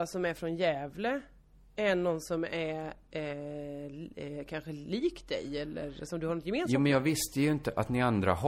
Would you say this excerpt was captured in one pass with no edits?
yes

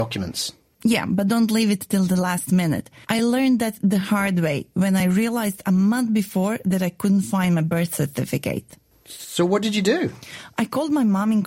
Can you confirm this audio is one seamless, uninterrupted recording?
yes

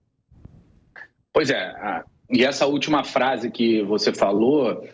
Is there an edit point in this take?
no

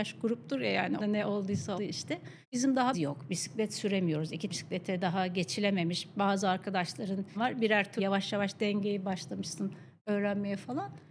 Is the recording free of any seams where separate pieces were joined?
no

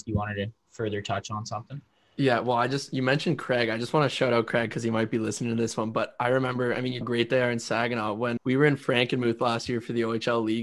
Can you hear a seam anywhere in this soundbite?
yes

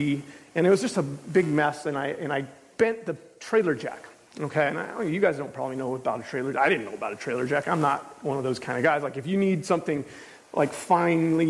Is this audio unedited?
yes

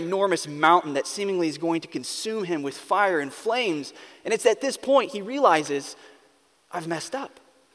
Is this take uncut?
yes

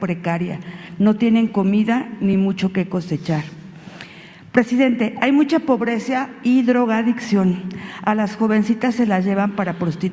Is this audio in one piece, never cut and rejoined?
yes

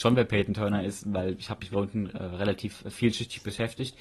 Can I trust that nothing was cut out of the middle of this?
no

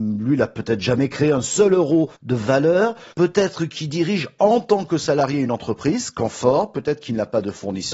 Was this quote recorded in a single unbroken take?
no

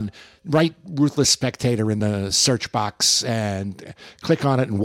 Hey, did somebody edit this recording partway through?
no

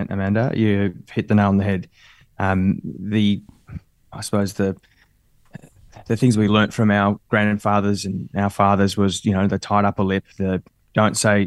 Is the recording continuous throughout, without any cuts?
yes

